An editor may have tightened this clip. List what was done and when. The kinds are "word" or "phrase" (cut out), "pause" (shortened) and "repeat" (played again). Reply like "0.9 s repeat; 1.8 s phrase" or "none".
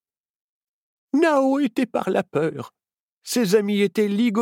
1.9 s word